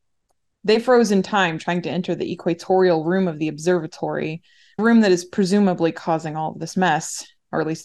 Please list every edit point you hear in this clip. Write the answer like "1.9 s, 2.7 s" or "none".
4.8 s